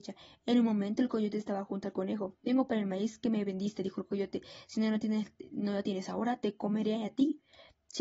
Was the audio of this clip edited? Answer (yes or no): no